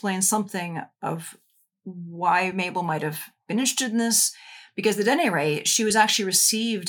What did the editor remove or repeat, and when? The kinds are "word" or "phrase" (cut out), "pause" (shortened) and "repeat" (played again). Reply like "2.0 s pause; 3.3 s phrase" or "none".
none